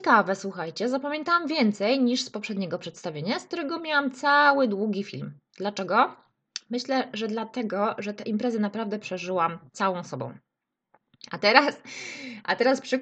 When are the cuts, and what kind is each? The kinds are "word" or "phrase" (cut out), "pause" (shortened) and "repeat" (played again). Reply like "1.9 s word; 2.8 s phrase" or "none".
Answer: 9.7 s pause